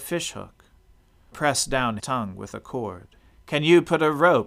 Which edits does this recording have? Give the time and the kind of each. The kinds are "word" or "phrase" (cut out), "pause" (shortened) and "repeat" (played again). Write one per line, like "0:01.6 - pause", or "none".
0:01.3 - word
0:02.0 - word
0:03.2 - pause